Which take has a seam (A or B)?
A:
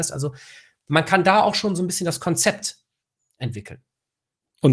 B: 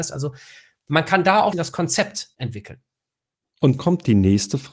B